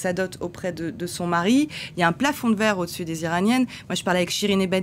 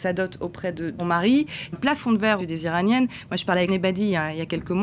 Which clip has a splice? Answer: second; 4 cuts; at 1.0 s, 1.7 s, 2.4 s, 3.7 s

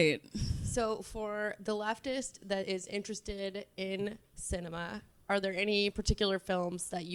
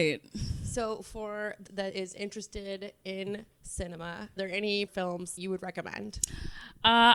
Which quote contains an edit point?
second; 4 cuts; at 1.7 s, 4.4 s, 4.9 s, 5.4 s

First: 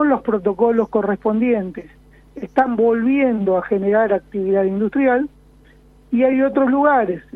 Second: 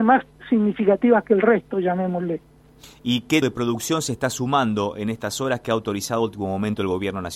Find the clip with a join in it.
second; 1 cut; at 3.4 s

